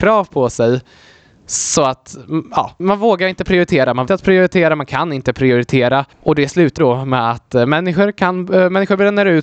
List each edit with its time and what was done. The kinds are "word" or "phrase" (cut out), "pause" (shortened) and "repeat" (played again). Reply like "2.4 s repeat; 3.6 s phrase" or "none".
2.8 s word; 4.1 s phrase; 6.1 s pause; 6.8 s word